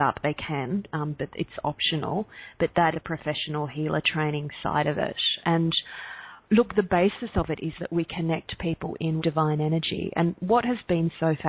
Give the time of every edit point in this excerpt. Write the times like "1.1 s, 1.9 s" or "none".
2.9 s, 5.4 s, 9.2 s